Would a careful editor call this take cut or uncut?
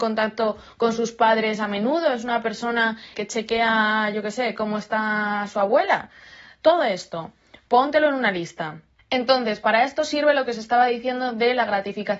cut